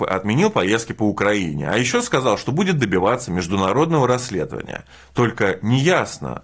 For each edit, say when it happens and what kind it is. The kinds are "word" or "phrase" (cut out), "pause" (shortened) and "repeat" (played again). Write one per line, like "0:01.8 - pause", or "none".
none